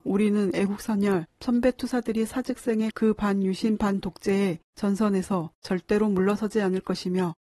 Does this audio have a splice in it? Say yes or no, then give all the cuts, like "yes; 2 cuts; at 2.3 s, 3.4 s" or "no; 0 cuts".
yes; 1 cut; at 2.9 s